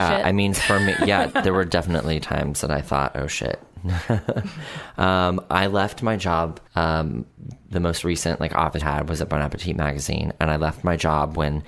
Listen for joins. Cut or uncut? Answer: cut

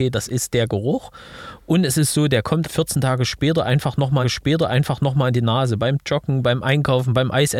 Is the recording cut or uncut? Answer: cut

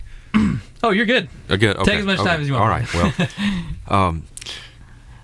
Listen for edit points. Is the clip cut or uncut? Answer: uncut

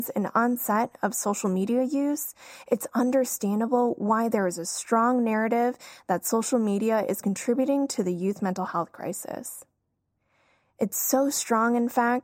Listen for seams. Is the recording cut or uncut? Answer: uncut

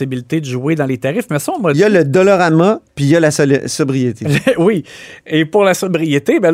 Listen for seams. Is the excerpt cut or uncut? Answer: uncut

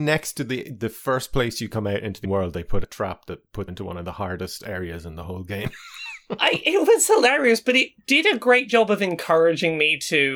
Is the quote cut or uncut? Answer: cut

